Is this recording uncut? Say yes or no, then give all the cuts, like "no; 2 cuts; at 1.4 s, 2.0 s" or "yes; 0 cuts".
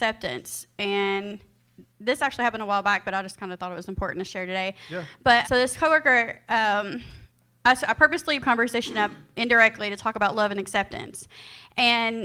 no; 2 cuts; at 5.4 s, 8.4 s